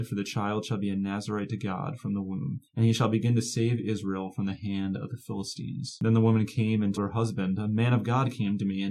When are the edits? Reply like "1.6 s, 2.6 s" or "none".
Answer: 2.7 s, 7.0 s